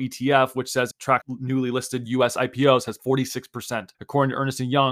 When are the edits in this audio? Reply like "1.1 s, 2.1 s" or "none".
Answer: 0.9 s, 1.2 s, 3.0 s, 3.9 s

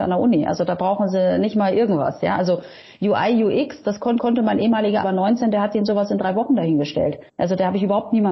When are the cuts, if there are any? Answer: 3.8 s, 4.2 s, 5.0 s, 7.3 s

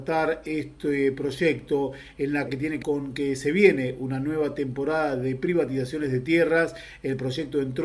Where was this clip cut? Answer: 2.5 s, 2.8 s

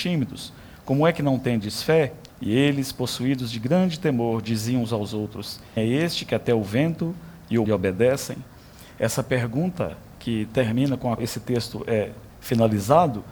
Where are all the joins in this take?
2.3 s, 5.8 s, 7.6 s, 11.2 s, 12.3 s

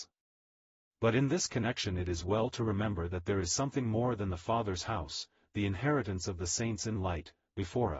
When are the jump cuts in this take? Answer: none

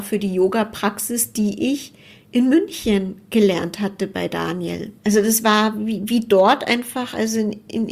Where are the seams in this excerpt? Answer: 5.0 s

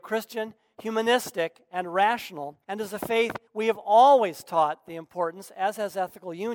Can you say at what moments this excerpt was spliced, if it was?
2.6 s, 3.5 s

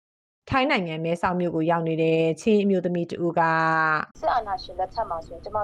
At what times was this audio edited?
4.1 s

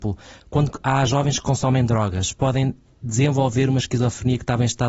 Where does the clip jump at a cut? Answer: none

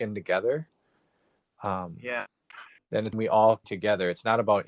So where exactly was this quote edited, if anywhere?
2.8 s, 3.1 s, 3.6 s

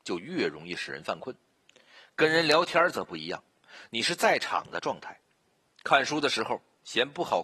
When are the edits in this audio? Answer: none

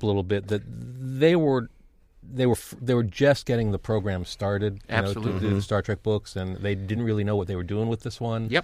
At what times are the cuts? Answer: none

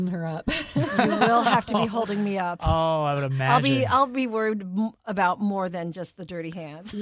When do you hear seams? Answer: none

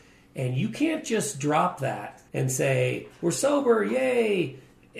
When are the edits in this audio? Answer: 2.3 s

